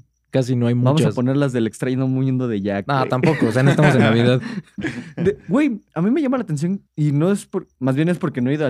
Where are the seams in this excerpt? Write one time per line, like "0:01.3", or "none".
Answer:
0:05.9
0:06.9